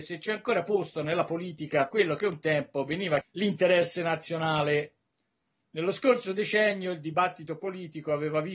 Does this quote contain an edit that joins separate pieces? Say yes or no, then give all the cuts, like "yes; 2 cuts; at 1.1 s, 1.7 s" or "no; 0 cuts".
yes; 2 cuts; at 1.9 s, 3.2 s